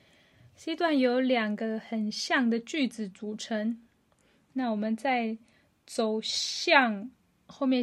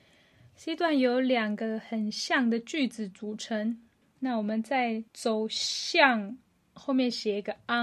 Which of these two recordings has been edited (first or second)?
second